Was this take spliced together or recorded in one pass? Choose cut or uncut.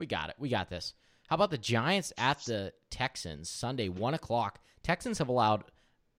uncut